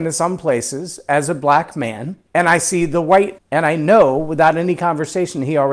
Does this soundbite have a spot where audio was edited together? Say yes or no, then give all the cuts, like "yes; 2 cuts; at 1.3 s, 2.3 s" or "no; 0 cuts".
yes; 2 cuts; at 2.3 s, 3.4 s